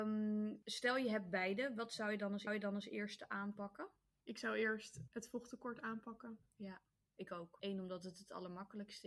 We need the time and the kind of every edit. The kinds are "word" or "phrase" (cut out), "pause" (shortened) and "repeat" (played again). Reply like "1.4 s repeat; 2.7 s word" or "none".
2.5 s repeat